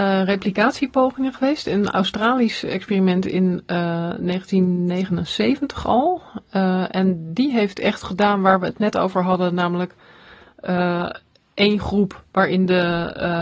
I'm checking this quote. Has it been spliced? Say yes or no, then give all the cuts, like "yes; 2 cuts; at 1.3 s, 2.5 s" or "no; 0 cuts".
no; 0 cuts